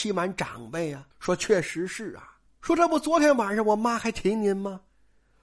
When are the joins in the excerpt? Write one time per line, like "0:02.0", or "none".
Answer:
0:01.1
0:02.5